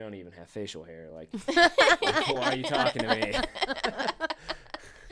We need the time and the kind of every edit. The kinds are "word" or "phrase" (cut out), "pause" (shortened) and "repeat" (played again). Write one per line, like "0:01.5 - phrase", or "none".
none